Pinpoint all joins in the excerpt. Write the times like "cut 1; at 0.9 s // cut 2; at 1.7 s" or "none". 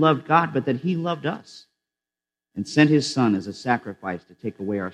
none